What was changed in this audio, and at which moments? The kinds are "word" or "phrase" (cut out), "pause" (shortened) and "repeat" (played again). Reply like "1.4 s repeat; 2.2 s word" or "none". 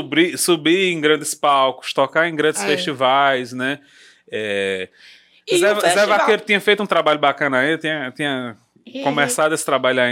none